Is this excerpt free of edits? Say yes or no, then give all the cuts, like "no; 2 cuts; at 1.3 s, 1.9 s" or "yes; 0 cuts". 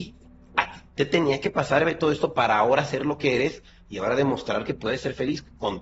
yes; 0 cuts